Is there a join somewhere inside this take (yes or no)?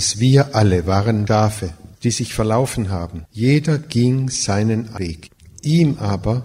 yes